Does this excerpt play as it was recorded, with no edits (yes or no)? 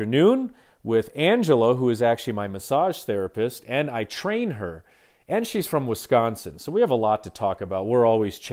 yes